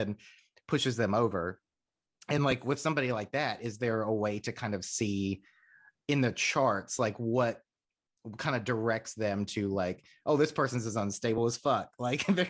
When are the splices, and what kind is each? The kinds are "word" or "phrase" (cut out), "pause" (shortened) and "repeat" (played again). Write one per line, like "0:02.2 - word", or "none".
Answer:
none